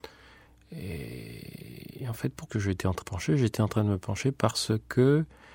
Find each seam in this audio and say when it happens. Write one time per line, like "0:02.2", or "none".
0:02.5
0:03.0